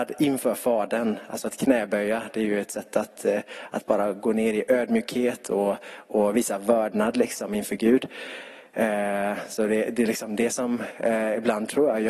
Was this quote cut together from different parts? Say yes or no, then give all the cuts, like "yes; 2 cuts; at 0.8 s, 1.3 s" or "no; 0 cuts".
no; 0 cuts